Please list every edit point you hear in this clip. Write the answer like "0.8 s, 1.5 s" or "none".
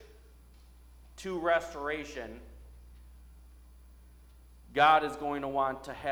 none